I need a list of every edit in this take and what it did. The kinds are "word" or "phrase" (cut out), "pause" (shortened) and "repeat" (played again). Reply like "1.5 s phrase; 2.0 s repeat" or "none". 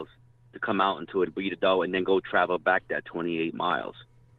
1.3 s word